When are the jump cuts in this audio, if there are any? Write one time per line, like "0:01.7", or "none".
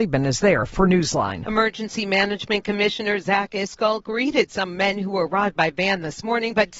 none